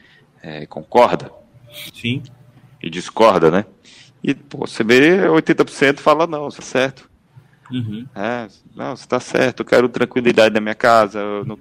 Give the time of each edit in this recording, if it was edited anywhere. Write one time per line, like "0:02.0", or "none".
0:01.9
0:06.6
0:09.6